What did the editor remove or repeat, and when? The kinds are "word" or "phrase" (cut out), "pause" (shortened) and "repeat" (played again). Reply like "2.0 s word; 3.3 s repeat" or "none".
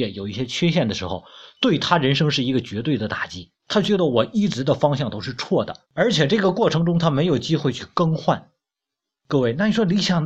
3.6 s pause; 5.8 s pause